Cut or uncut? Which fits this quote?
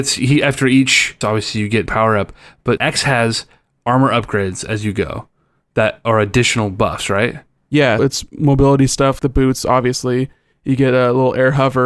cut